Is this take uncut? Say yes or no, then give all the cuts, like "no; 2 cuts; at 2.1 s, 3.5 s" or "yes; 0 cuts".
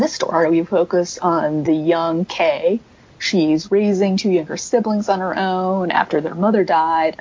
yes; 0 cuts